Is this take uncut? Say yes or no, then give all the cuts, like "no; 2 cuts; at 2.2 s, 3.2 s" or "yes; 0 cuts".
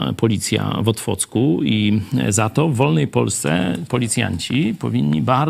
no; 1 cut; at 3.9 s